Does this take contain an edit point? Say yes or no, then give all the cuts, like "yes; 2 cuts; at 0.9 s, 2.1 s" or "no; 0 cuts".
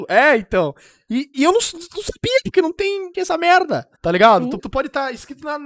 yes; 4 cuts; at 1.3 s, 3.1 s, 3.9 s, 4.6 s